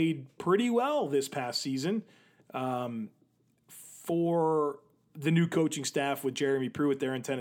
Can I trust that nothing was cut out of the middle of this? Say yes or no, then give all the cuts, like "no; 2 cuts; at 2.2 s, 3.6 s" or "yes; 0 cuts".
yes; 0 cuts